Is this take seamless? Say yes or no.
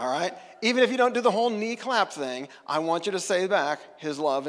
yes